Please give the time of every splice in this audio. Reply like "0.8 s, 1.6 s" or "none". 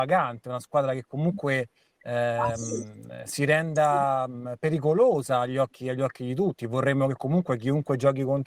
none

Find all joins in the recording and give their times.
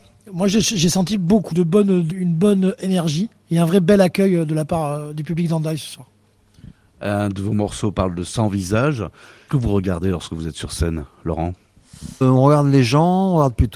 1.5 s, 2.1 s, 9.5 s, 12.2 s

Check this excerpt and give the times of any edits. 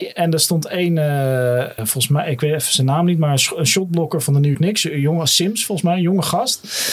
1.8 s, 4.5 s

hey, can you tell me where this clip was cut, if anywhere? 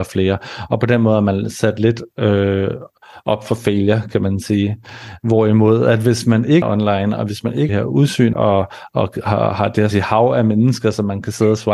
6.6 s, 7.7 s, 8.3 s, 9.9 s

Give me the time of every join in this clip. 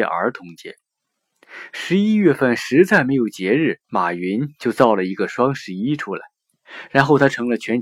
3.8 s

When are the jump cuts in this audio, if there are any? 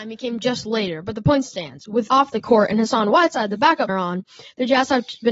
1.5 s, 2.1 s, 3.9 s

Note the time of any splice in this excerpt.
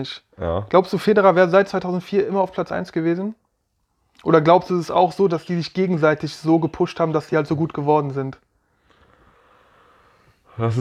none

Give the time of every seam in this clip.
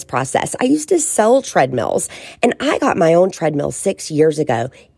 none

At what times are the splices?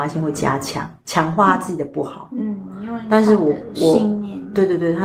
1.0 s

